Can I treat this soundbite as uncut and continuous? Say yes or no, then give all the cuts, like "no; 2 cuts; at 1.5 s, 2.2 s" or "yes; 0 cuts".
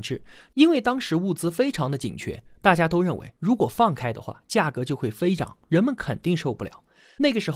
yes; 0 cuts